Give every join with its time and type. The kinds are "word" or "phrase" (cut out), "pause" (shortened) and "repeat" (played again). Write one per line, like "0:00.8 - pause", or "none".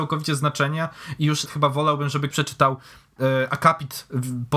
0:01.5 - word
0:02.3 - word